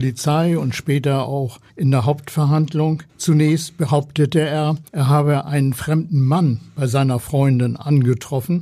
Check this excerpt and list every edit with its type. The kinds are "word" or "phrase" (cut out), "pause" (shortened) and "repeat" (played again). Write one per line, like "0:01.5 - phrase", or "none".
0:01.7 - pause
0:03.1 - pause
0:04.9 - pause